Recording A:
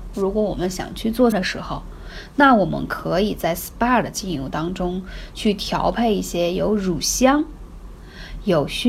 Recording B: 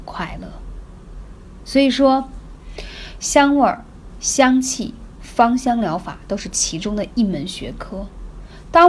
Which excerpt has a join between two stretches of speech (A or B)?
A